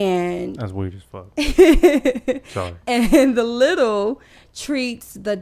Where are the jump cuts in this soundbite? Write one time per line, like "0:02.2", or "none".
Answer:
none